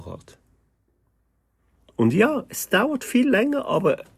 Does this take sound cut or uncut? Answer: uncut